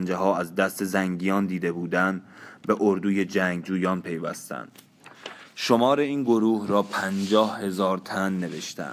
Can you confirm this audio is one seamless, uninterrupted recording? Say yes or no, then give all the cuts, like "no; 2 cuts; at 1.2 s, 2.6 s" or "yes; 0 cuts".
yes; 0 cuts